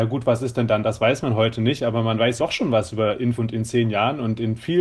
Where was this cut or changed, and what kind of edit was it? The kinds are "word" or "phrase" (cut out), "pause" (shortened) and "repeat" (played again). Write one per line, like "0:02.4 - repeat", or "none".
0:02.4 - word
0:03.4 - word